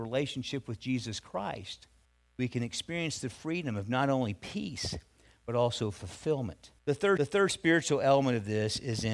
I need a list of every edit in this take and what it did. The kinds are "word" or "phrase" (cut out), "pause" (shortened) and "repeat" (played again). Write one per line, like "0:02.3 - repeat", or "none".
0:02.1 - pause
0:06.8 - pause
0:07.2 - repeat